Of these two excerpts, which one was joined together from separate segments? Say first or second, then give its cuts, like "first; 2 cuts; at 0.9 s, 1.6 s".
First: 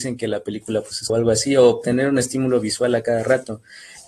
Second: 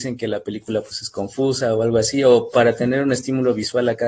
first; 2 cuts; at 1.1 s, 1.8 s